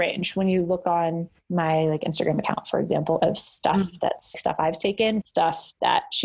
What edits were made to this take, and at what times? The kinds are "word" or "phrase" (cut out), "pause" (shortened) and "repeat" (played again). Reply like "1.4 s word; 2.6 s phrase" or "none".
1.3 s pause; 3.2 s phrase; 4.3 s word; 5.2 s word